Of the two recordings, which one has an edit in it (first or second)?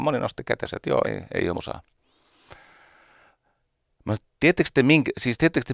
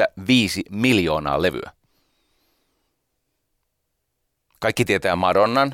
first